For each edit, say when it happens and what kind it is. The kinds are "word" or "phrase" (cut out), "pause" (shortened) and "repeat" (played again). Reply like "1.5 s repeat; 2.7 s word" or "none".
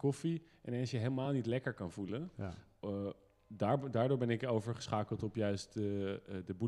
none